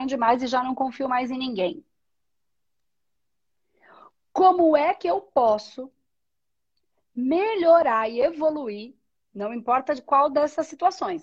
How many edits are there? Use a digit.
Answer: 0